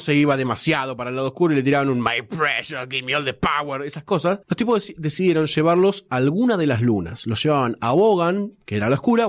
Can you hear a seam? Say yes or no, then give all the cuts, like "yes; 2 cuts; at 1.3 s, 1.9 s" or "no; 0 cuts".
no; 0 cuts